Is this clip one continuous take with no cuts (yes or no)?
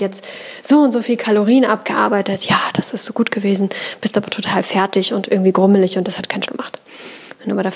no